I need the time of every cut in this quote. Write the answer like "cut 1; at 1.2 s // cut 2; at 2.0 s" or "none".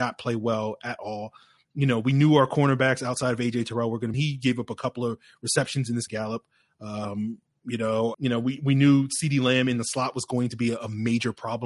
cut 1; at 4.1 s // cut 2; at 6.1 s // cut 3; at 8.1 s